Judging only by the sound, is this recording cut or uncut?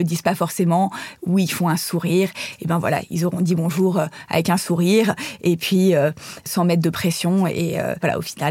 uncut